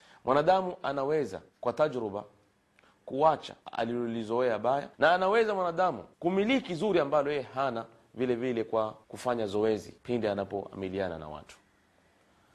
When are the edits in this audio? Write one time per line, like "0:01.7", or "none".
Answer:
0:01.5
0:03.6
0:04.9
0:06.1
0:09.0
0:10.0